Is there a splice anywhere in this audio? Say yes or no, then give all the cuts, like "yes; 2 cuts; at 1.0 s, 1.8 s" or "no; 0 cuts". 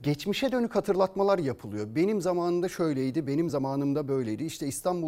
no; 0 cuts